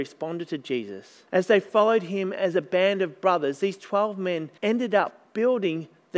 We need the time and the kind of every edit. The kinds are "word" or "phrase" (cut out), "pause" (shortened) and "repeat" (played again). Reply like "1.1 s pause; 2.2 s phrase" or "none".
1.3 s pause; 4.6 s pause